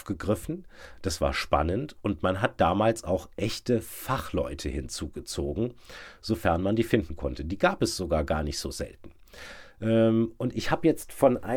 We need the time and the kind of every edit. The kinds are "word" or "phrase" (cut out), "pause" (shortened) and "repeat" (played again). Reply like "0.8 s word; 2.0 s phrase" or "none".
none